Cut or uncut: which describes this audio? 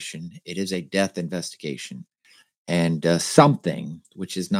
uncut